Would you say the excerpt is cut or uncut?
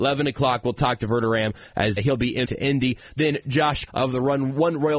cut